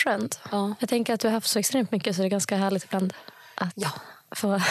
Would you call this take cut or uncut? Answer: uncut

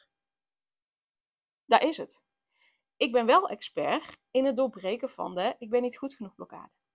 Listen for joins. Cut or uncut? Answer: uncut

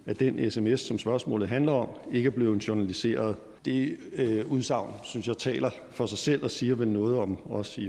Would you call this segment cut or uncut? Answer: cut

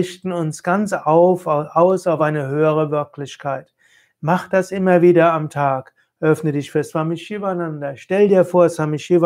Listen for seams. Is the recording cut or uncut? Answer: uncut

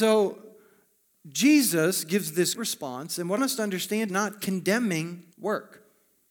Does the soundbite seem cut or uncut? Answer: cut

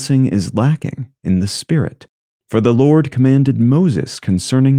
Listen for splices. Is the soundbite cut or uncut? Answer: uncut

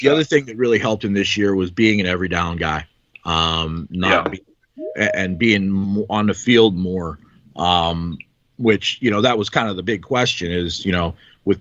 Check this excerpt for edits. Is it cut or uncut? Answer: uncut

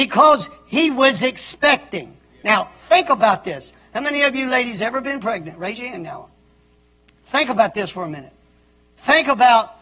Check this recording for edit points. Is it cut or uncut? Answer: uncut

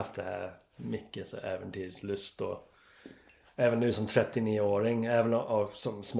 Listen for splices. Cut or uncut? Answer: uncut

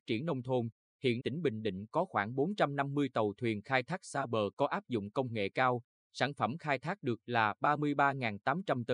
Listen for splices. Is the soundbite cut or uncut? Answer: cut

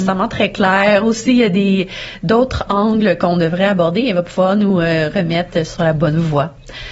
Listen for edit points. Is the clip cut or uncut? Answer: uncut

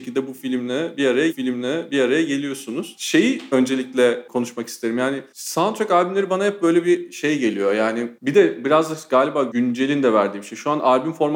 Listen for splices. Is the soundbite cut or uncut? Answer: cut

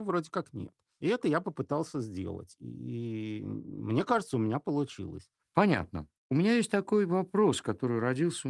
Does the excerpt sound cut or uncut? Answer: uncut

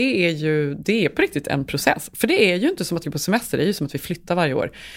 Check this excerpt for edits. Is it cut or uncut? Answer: cut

